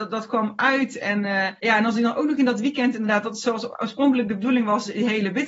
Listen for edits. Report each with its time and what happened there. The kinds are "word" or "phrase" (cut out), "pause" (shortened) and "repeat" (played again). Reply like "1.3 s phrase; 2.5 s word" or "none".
1.6 s pause